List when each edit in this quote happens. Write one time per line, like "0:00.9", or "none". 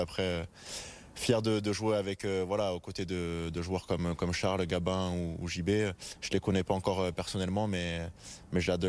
none